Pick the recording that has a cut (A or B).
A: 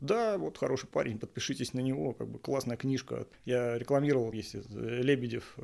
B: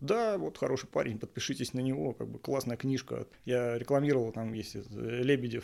A